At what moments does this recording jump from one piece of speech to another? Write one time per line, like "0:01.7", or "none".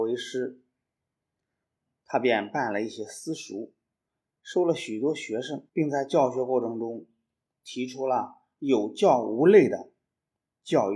0:05.7